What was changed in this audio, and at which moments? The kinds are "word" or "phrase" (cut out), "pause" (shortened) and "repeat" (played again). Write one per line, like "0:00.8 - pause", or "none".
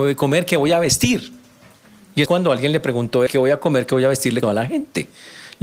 0:02.3 - word
0:03.3 - word
0:04.4 - word